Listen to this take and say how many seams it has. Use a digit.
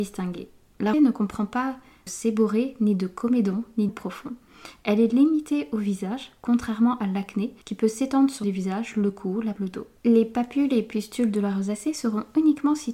7